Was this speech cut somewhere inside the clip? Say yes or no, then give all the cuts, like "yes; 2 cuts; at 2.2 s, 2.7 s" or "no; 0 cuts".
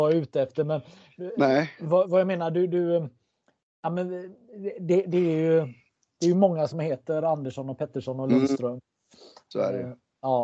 no; 0 cuts